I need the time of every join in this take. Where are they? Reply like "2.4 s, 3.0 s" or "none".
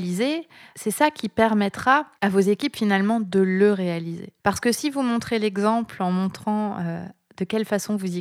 2.2 s, 4.4 s